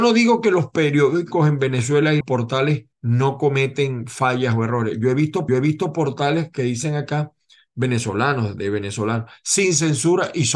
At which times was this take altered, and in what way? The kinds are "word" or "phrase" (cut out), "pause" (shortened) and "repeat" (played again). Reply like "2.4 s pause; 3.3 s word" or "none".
2.2 s word; 2.9 s pause; 5.5 s repeat